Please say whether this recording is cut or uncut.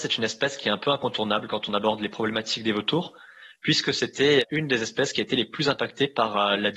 uncut